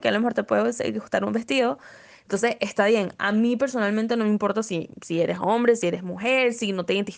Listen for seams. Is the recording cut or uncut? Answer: uncut